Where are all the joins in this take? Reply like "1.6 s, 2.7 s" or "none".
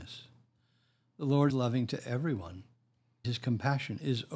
1.5 s, 3.2 s